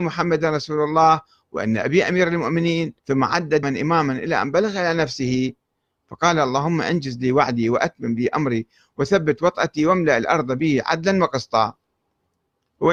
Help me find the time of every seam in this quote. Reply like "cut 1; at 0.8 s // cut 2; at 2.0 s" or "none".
cut 1; at 3.0 s // cut 2; at 3.6 s